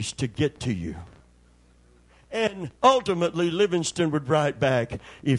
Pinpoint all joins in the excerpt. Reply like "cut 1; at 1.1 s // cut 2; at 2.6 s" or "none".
cut 1; at 2.8 s